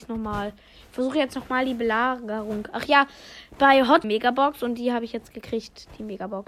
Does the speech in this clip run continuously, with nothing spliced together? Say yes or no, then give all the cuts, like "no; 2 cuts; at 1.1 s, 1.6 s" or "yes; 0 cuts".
no; 1 cut; at 4.0 s